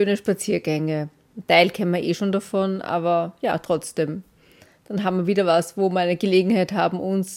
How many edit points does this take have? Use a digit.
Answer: 0